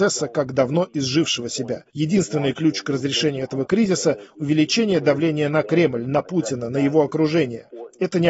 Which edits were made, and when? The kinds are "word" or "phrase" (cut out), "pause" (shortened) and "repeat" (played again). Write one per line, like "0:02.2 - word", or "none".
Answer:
0:01.9 - pause